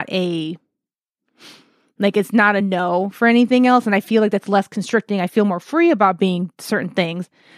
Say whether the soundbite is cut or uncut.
uncut